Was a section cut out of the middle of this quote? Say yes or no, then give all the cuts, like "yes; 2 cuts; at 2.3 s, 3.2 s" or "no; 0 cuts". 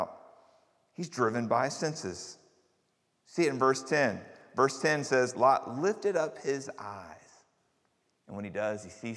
no; 0 cuts